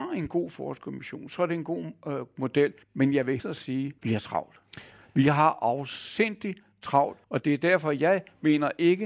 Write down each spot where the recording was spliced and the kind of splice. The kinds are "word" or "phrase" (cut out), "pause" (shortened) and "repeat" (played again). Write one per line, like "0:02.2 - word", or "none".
0:02.8 - pause
0:03.4 - word
0:04.0 - pause
0:07.2 - pause